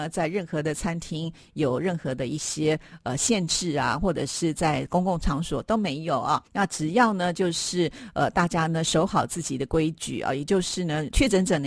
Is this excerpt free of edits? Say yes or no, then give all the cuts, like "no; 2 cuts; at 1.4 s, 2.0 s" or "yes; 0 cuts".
no; 1 cut; at 6.5 s